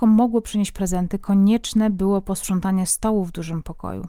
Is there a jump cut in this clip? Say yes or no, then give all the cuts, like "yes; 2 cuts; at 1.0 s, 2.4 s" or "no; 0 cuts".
no; 0 cuts